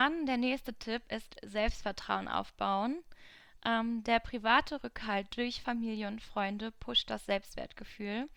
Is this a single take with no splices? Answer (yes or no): yes